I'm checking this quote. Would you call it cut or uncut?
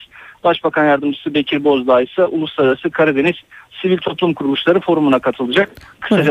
uncut